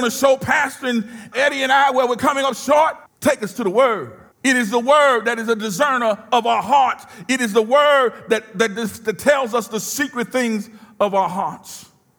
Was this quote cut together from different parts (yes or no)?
yes